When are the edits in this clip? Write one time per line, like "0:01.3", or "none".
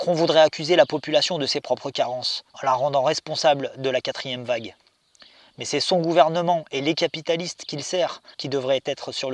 0:02.5
0:08.3